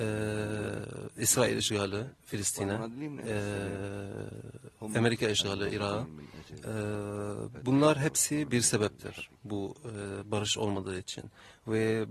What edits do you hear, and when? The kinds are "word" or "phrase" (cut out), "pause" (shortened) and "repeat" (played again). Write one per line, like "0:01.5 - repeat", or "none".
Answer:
0:02.2 - pause